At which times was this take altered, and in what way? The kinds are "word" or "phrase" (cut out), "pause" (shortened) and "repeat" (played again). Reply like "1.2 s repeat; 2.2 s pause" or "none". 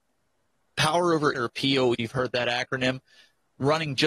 1.3 s word; 1.9 s word